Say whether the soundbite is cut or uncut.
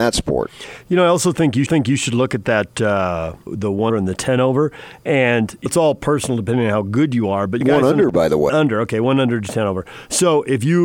cut